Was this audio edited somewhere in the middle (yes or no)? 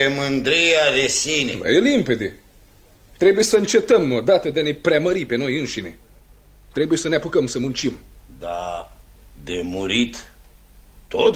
no